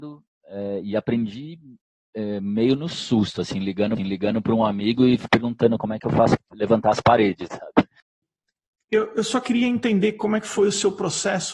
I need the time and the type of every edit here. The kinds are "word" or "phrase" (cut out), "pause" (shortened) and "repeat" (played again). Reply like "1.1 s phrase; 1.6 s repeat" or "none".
4.0 s repeat; 6.4 s word; 7.5 s word